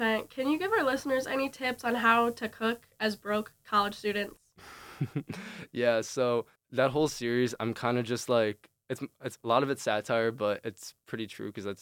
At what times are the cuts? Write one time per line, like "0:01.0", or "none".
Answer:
0:06.6